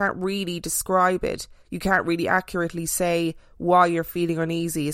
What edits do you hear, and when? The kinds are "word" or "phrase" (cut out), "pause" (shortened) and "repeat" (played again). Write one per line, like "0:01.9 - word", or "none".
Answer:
0:01.6 - pause